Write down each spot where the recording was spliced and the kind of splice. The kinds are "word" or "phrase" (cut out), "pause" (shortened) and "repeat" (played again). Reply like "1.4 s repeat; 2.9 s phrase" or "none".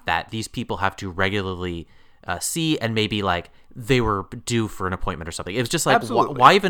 none

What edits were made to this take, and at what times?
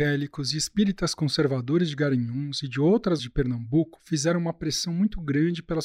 3.2 s word

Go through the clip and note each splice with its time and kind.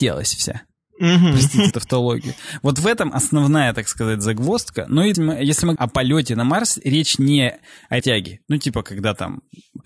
1.7 s word; 5.1 s phrase; 5.8 s word; 8.0 s word

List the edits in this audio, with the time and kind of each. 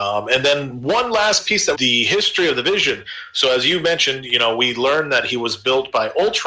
1.7 s phrase

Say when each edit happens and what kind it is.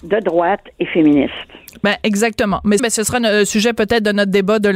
2.8 s phrase

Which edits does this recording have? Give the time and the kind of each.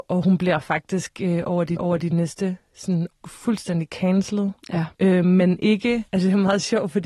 1.8 s repeat; 3.1 s word; 4.9 s pause; 6.1 s pause

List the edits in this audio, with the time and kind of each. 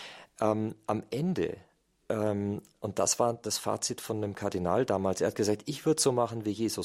none

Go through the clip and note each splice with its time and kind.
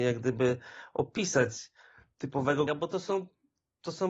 2.7 s word

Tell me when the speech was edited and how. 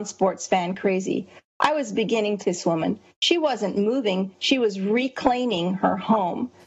2.4 s word

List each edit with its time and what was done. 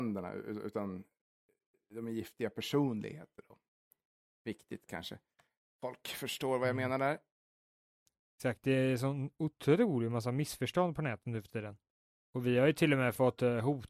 none

